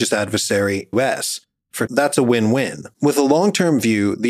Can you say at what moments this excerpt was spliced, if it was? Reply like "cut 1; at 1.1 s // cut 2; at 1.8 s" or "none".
cut 1; at 0.9 s // cut 2; at 1.9 s // cut 3; at 2.9 s

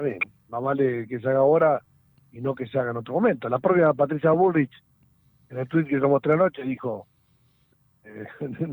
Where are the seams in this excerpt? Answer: none

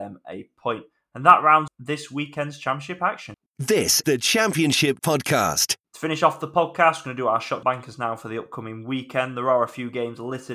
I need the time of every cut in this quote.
cut 1; at 1.7 s // cut 2; at 4.0 s // cut 3; at 5.0 s // cut 4; at 7.6 s

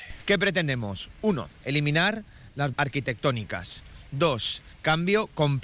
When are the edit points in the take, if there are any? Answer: cut 1; at 1.5 s // cut 2; at 2.7 s // cut 3; at 4.7 s

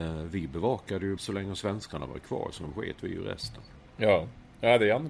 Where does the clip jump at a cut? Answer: cut 1; at 1.2 s

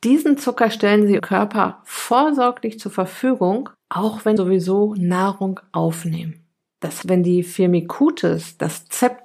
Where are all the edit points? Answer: cut 1; at 1.2 s // cut 2; at 3.7 s // cut 3; at 4.4 s // cut 4; at 7.0 s

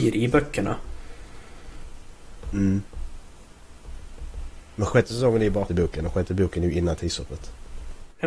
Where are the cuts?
cut 1; at 4.9 s // cut 2; at 5.7 s

